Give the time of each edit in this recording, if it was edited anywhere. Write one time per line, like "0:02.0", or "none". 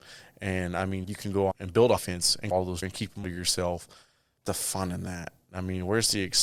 0:01.0
0:01.5
0:02.0
0:02.5
0:02.8
0:03.2
0:04.5

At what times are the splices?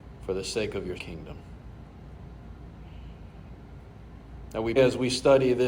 0:01.0
0:04.8

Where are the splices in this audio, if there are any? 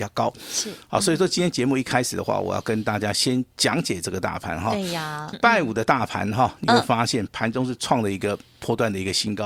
0:05.3

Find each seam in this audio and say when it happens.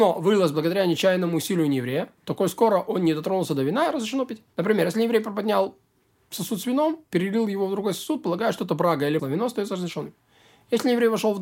0:02.2
0:04.5
0:07.1
0:09.2

